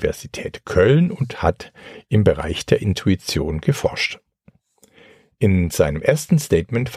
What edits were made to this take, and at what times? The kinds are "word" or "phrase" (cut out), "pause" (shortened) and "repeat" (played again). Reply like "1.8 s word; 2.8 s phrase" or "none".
none